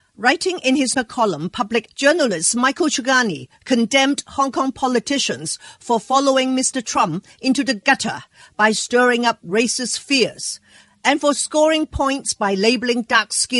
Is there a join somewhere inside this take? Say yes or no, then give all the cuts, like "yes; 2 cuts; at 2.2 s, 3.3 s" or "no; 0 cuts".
yes; 2 cuts; at 0.9 s, 1.9 s